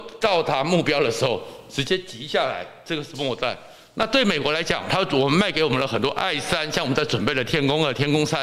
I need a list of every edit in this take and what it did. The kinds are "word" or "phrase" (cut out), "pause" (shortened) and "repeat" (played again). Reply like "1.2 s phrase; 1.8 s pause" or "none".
none